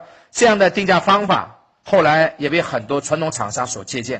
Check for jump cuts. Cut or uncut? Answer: uncut